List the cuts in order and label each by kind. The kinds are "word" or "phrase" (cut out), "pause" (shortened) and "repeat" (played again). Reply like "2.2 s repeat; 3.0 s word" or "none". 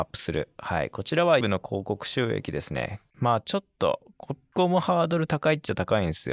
1.4 s word